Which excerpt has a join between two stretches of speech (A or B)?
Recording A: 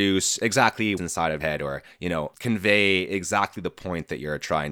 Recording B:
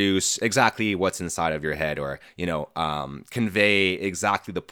A